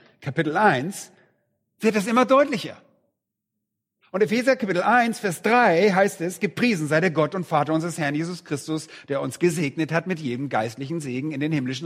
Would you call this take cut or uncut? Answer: uncut